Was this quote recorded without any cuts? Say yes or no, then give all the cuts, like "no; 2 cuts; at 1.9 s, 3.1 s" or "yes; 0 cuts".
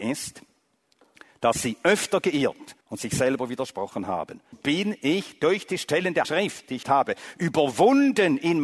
no; 4 cuts; at 2.8 s, 4.5 s, 6.2 s, 6.8 s